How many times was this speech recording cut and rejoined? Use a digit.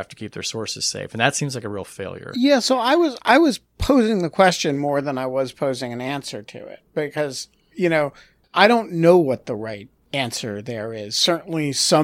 0